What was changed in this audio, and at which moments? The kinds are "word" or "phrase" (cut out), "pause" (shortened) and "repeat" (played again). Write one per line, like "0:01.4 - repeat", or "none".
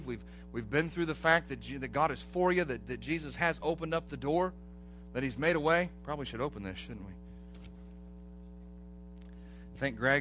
none